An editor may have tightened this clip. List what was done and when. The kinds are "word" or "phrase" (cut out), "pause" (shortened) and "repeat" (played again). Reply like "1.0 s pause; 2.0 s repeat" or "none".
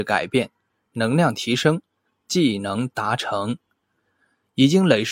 none